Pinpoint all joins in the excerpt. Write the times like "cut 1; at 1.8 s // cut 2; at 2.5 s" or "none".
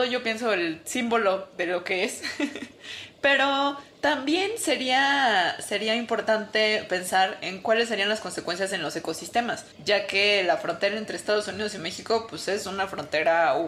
cut 1; at 9.7 s